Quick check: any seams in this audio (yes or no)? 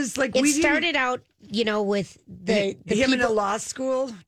no